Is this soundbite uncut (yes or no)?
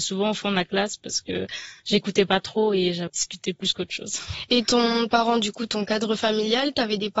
no